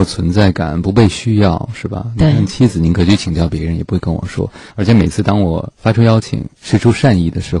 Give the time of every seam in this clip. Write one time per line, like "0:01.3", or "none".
0:04.7
0:05.8
0:06.5